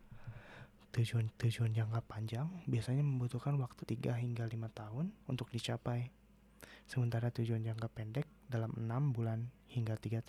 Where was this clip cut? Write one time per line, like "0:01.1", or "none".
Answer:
0:01.3
0:03.8
0:05.2
0:08.4